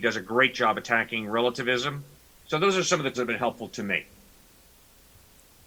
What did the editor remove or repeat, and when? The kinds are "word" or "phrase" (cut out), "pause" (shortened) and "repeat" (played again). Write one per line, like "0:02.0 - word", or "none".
0:02.1 - pause
0:03.1 - word

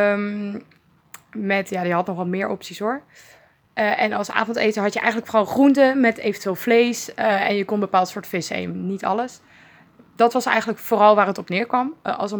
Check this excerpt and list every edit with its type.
none

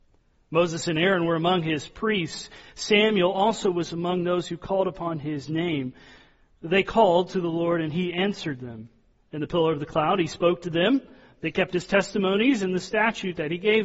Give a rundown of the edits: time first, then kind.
none

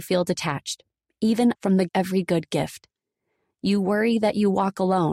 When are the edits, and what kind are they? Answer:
0:01.6 - word
0:01.9 - phrase

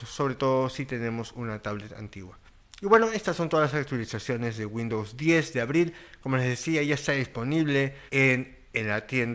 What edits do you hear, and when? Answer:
0:08.1 - pause

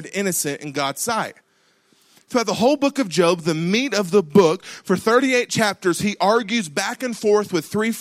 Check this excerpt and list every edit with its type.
none

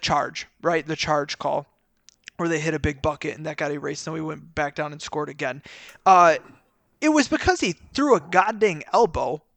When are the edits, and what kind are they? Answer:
none

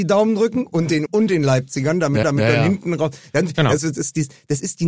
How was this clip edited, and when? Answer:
0:01.1 - word
0:02.2 - repeat

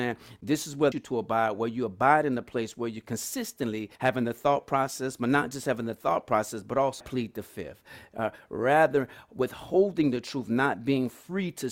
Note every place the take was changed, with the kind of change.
0:00.9 - phrase
0:04.0 - pause
0:07.0 - phrase

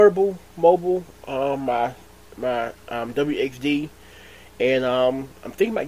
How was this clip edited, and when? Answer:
0:02.8 - pause

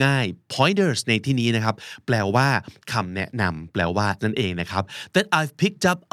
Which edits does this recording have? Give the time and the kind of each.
0:04.2 - word

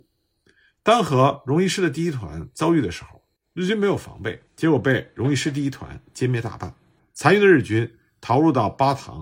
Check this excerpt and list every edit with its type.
0:04.5 - pause
0:07.0 - pause

